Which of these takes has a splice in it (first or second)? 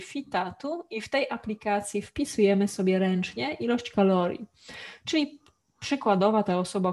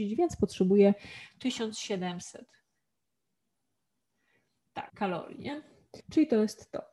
second